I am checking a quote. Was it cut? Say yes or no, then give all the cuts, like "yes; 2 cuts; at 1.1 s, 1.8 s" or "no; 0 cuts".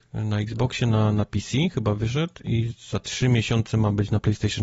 no; 0 cuts